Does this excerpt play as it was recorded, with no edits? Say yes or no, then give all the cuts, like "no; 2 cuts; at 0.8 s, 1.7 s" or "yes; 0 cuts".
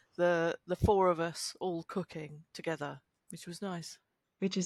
no; 1 cut; at 2.5 s